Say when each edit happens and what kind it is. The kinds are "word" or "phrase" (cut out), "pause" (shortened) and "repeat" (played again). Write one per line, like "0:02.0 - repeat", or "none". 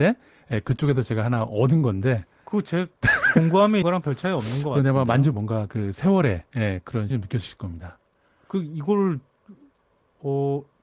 0:03.8 - word
0:05.3 - word
0:06.5 - pause
0:07.1 - word